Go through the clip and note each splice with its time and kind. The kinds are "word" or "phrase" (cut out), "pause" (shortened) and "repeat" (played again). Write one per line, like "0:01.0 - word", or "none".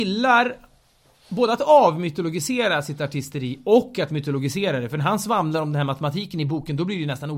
none